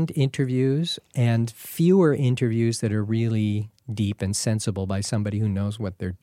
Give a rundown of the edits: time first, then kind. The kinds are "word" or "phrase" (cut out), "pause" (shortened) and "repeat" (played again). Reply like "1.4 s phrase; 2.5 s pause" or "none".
none